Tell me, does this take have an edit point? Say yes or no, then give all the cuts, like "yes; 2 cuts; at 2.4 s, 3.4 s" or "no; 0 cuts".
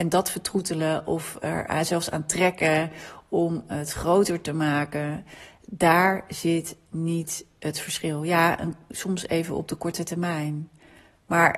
no; 0 cuts